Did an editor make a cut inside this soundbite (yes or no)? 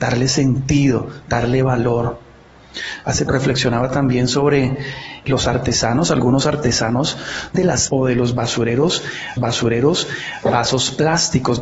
yes